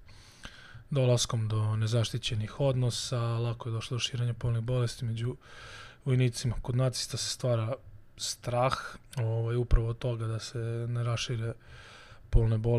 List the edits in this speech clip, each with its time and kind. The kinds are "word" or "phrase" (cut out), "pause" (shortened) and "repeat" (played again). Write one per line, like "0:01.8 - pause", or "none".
0:09.1 - pause